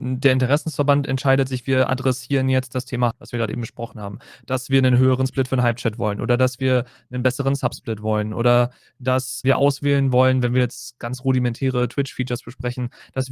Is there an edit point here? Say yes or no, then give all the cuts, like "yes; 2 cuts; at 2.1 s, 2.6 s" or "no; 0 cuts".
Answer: yes; 3 cuts; at 3.1 s, 9.4 s, 11.0 s